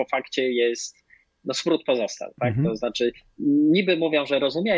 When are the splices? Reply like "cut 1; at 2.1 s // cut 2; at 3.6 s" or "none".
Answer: none